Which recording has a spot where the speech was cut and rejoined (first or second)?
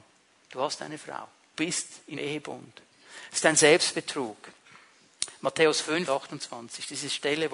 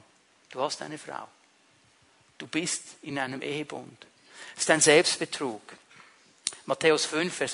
first